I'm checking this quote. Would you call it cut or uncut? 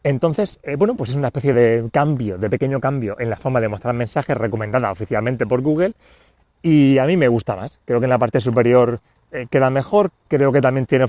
uncut